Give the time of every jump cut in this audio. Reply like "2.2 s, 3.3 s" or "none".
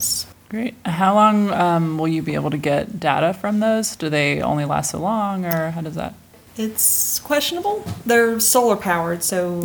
none